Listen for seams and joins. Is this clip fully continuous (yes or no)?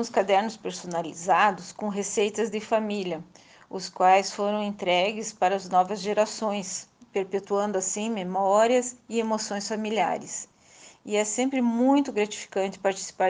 yes